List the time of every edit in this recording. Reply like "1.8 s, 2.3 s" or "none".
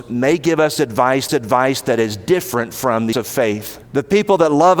1.3 s, 3.1 s, 3.8 s